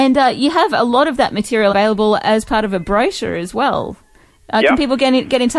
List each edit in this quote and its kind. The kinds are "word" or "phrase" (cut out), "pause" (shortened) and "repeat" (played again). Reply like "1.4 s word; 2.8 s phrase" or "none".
1.7 s word